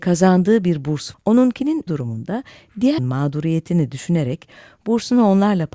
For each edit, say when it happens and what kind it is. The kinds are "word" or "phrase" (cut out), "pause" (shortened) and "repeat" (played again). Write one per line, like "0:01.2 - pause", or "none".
0:01.1 - word
0:01.9 - word
0:03.0 - word